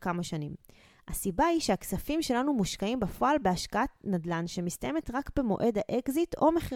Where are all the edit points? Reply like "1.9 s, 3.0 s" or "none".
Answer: none